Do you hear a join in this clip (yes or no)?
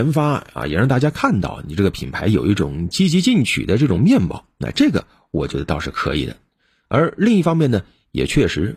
no